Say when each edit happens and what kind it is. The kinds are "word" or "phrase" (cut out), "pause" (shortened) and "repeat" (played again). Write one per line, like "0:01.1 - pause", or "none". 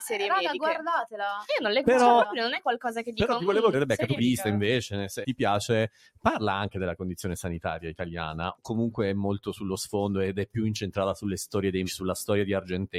0:01.8 - word
0:03.7 - word
0:04.2 - word
0:05.2 - word
0:08.5 - word
0:11.9 - word